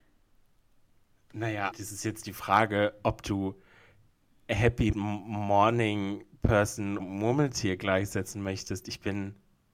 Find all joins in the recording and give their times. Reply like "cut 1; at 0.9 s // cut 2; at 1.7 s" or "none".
cut 1; at 1.7 s // cut 2; at 4.9 s // cut 3; at 7.0 s